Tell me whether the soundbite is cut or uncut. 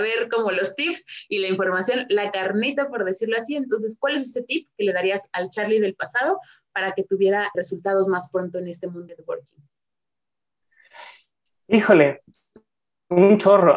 cut